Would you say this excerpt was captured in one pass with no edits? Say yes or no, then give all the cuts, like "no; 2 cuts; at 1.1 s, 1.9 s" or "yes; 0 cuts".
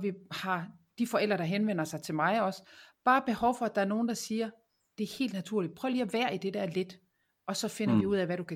yes; 0 cuts